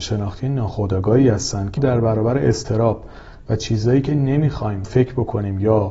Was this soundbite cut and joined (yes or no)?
yes